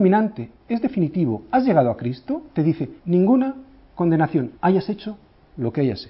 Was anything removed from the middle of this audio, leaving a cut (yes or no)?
yes